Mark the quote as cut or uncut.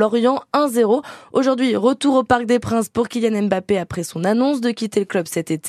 uncut